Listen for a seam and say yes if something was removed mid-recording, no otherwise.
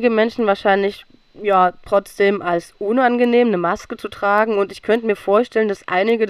no